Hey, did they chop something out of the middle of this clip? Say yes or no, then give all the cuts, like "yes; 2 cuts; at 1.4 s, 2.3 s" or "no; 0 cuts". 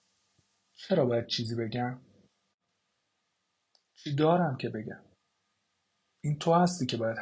no; 0 cuts